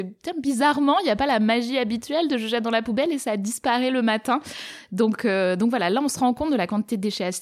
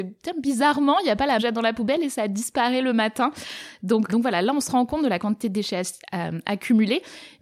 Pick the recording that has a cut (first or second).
second